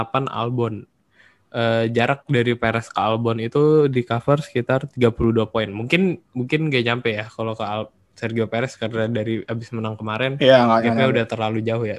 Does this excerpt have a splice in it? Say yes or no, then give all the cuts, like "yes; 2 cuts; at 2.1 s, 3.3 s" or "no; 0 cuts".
no; 0 cuts